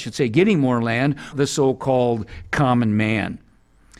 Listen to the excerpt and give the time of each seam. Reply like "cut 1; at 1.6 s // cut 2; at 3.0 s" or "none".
cut 1; at 1.3 s